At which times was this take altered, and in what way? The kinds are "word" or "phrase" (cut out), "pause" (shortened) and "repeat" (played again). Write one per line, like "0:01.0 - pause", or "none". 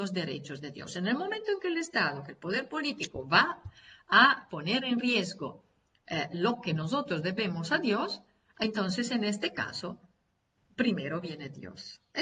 none